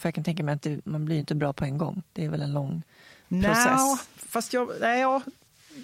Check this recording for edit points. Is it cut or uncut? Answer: uncut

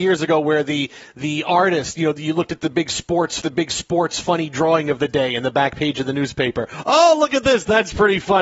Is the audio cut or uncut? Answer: cut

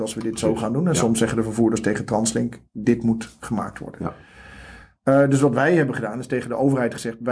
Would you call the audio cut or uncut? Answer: uncut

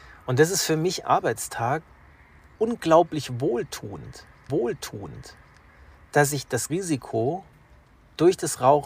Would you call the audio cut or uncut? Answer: cut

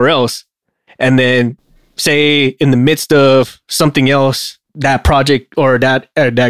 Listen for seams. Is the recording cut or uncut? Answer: cut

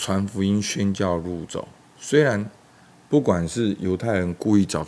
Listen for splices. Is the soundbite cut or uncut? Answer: uncut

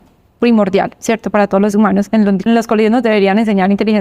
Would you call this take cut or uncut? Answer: cut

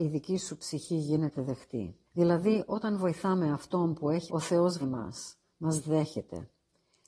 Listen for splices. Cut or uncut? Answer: cut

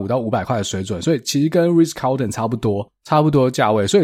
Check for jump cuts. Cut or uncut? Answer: uncut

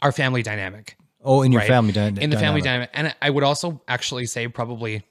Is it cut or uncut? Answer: uncut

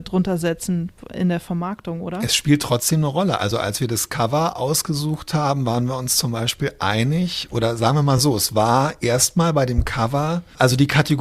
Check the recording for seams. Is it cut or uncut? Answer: uncut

